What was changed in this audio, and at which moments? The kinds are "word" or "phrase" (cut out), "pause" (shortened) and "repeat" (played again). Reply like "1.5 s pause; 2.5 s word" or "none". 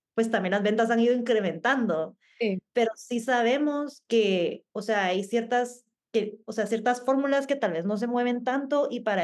5.9 s pause